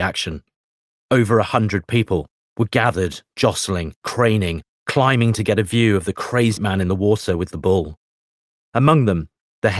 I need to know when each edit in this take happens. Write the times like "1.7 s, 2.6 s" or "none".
4.0 s, 6.6 s